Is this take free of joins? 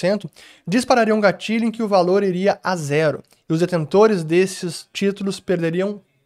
yes; 0 cuts

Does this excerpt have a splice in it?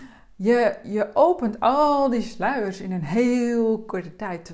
no; 0 cuts

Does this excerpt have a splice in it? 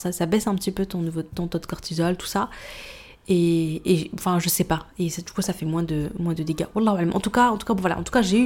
no; 0 cuts

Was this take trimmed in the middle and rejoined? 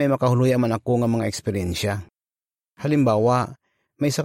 no; 0 cuts

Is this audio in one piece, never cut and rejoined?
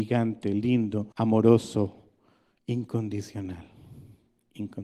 no; 1 cut; at 1.1 s

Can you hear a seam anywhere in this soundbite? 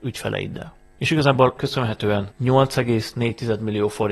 yes; 2 cuts; at 1.6 s, 2.3 s

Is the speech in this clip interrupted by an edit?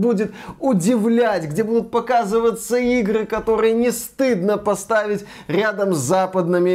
no; 0 cuts

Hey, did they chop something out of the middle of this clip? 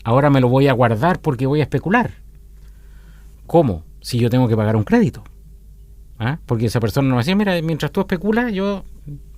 yes; 1 cut; at 3.3 s

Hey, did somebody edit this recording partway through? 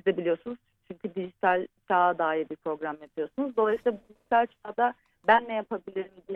no; 0 cuts

